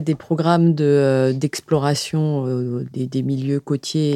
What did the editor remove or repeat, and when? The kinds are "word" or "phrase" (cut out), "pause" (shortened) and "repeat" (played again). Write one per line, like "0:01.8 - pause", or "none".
0:02.9 - word